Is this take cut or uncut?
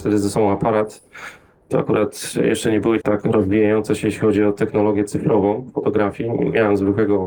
cut